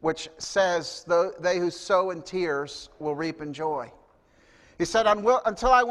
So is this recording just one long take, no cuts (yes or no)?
yes